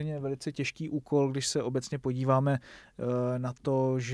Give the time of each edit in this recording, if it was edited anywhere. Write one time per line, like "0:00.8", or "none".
none